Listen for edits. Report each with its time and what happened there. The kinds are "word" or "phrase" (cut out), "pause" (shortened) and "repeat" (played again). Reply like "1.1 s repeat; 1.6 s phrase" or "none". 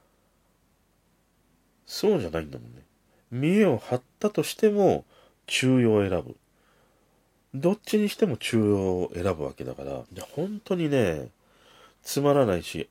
10.1 s pause